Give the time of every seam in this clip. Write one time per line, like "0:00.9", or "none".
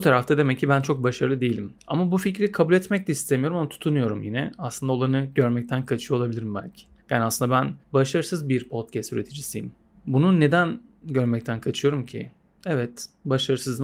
0:01.8
0:07.0
0:07.8
0:09.9